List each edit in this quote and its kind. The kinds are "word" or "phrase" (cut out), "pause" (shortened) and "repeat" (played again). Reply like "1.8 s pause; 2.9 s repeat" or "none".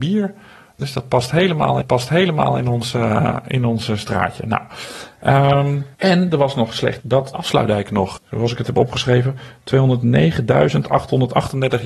1.8 s repeat; 5.9 s pause; 7.0 s word; 7.3 s word; 8.2 s word